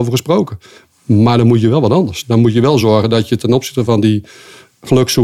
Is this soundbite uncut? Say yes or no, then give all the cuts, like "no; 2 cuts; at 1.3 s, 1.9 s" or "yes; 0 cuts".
yes; 0 cuts